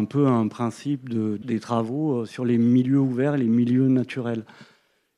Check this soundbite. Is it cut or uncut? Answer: cut